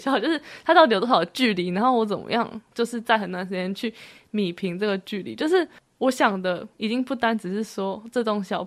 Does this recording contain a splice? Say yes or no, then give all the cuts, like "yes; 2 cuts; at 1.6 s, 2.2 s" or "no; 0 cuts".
no; 0 cuts